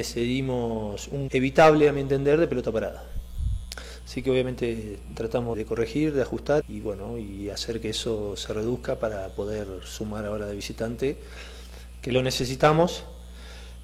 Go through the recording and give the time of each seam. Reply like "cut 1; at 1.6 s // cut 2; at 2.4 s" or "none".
cut 1; at 1.3 s // cut 2; at 5.5 s // cut 3; at 6.6 s